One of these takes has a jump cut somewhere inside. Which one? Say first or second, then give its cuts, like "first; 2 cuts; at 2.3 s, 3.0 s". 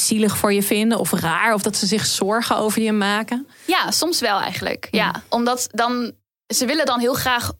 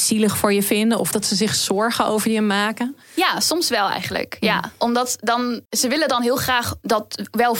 second; 2 cuts; at 1.1 s, 5.6 s